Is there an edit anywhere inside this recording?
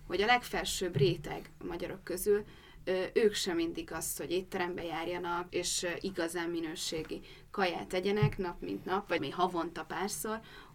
yes; 3 cuts; at 3.9 s, 5.5 s, 9.2 s

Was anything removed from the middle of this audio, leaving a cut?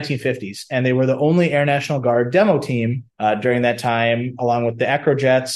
yes; 1 cut; at 3.1 s

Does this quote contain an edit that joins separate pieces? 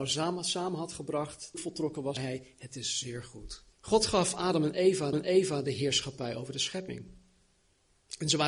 yes; 4 cuts; at 1.5 s, 2.2 s, 3.7 s, 5.1 s

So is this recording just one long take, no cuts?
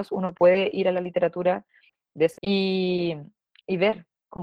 no; 1 cut; at 2.4 s

